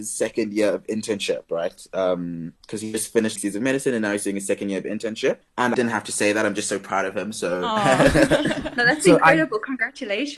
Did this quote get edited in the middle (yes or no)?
yes